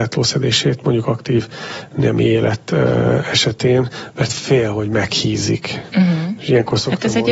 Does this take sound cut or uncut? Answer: uncut